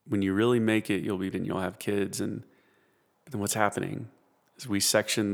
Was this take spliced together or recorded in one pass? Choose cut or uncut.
cut